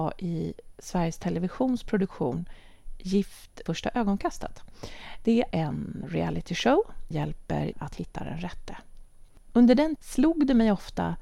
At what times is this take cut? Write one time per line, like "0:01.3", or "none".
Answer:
0:03.7
0:05.5
0:07.1
0:07.7
0:10.0